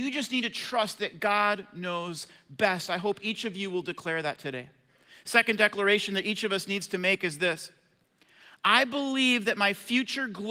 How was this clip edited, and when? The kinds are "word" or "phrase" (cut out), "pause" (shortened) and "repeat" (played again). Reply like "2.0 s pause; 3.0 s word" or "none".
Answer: none

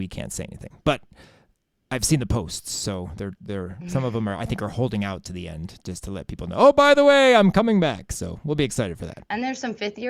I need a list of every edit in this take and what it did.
none

